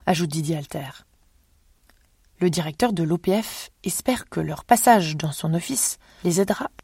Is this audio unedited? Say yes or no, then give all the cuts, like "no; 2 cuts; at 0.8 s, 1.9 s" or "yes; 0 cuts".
yes; 0 cuts